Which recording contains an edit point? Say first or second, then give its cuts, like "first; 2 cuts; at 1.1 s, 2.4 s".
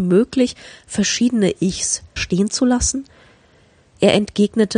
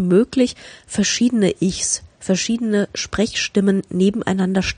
first; 1 cut; at 2.2 s